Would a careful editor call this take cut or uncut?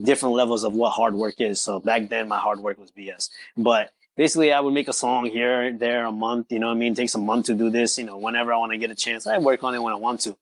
uncut